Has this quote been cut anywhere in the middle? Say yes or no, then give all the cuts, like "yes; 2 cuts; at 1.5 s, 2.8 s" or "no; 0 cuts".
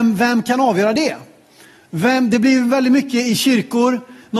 no; 0 cuts